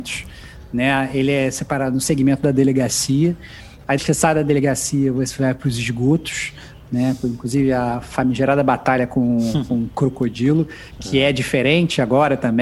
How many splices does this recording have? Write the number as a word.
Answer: two